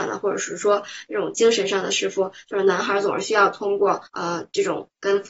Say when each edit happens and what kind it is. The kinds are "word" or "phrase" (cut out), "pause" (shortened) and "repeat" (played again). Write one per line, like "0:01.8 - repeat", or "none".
0:04.0 - pause